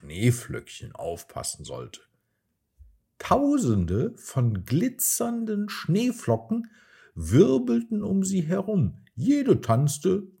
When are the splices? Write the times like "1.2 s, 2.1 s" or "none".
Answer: none